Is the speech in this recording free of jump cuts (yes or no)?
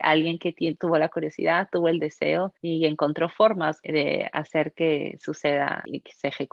no